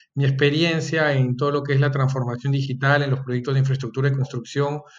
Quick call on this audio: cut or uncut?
uncut